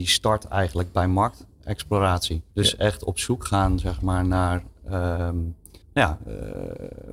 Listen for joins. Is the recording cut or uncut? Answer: cut